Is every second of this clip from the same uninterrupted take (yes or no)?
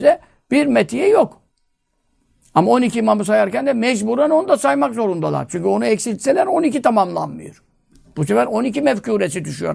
yes